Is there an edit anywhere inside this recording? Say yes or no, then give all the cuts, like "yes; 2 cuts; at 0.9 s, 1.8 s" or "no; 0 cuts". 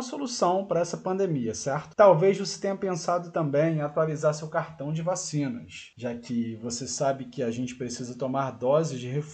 no; 0 cuts